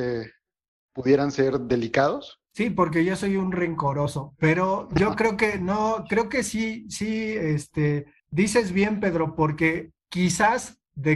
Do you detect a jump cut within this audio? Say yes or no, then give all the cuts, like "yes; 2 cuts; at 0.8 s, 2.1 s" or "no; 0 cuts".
yes; 2 cuts; at 2.5 s, 8.2 s